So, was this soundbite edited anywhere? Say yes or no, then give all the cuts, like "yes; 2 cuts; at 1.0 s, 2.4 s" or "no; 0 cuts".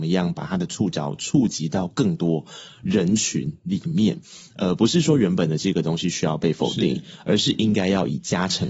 no; 0 cuts